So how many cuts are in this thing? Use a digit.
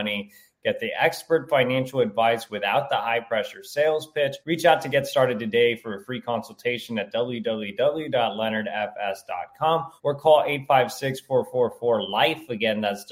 2